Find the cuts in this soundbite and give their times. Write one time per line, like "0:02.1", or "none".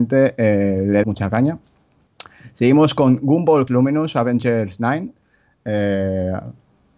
0:01.0
0:03.7